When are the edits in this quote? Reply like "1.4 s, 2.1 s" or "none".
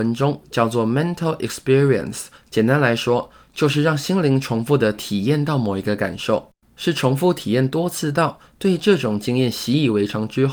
2.3 s

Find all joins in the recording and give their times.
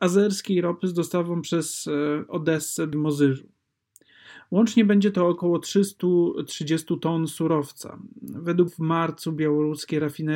2.9 s, 8.7 s

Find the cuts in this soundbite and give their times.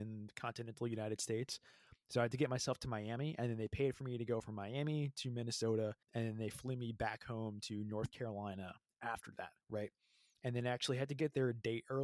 6.0 s, 9.6 s

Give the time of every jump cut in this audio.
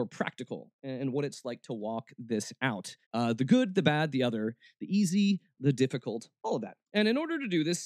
3.0 s, 6.9 s

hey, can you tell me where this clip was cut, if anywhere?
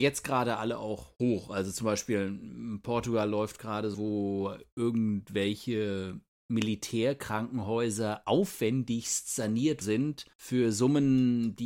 3.9 s, 9.8 s, 10.3 s

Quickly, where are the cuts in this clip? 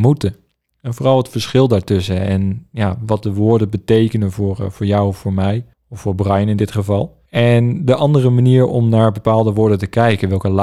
5.7 s, 7.3 s

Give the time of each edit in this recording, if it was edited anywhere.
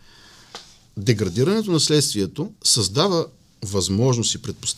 2.6 s

